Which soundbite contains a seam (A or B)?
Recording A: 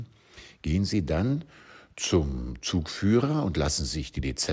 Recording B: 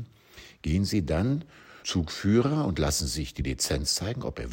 B